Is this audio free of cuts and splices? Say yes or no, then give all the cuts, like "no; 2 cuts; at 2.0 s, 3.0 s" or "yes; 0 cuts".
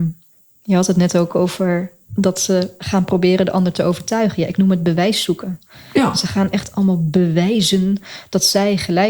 yes; 0 cuts